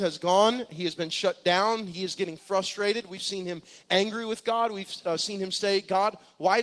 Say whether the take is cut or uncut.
uncut